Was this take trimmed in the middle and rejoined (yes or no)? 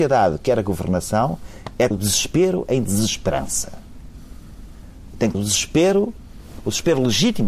yes